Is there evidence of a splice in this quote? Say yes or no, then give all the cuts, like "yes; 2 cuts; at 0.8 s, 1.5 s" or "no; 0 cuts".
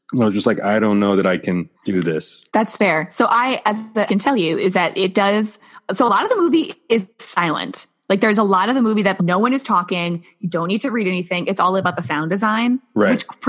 yes; 5 cuts; at 1.7 s, 2.5 s, 4.1 s, 7.1 s, 9.2 s